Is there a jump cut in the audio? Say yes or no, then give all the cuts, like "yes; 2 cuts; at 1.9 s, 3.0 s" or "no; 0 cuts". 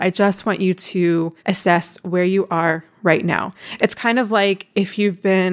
yes; 1 cut; at 1.4 s